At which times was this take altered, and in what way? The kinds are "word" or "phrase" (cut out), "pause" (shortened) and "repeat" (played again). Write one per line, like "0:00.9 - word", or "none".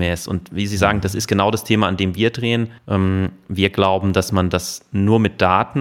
0:02.8 - pause